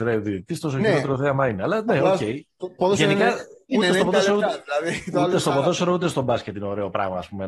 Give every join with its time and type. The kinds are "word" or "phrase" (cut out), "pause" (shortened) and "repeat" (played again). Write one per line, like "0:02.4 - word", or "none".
none